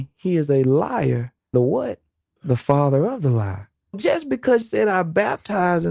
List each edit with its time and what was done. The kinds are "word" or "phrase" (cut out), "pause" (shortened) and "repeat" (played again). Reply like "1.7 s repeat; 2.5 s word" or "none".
1.5 s word; 2.4 s word; 3.9 s word; 4.6 s word